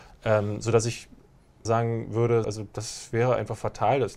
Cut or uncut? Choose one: cut